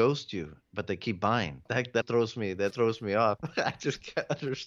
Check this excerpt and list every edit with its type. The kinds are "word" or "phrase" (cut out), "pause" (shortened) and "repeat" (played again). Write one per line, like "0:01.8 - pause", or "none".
0:01.7 - pause
0:02.0 - word
0:02.7 - word